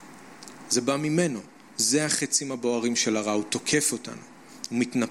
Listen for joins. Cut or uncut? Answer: uncut